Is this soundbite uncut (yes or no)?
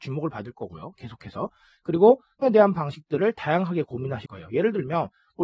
no